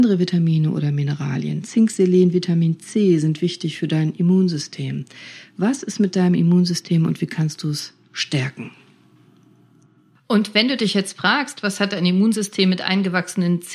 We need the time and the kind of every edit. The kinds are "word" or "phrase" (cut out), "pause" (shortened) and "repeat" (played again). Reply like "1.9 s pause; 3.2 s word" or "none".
none